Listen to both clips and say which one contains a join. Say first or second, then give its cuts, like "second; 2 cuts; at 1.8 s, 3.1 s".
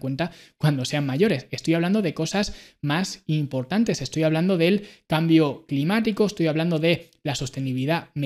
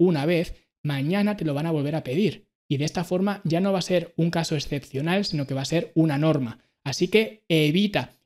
second; 1 cut; at 2.6 s